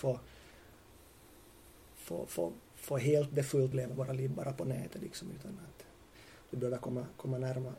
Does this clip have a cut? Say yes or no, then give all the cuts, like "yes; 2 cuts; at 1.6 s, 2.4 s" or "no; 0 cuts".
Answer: yes; 2 cuts; at 2.7 s, 3.7 s